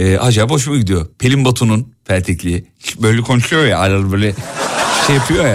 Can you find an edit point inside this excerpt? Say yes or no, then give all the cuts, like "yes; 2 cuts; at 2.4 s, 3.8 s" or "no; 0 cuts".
yes; 1 cut; at 2.0 s